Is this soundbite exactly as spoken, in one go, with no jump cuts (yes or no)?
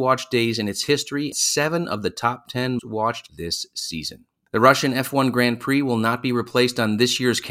no